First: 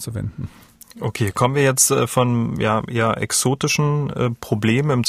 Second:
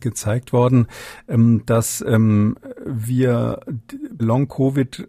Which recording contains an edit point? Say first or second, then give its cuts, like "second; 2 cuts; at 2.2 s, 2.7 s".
second; 1 cut; at 4.2 s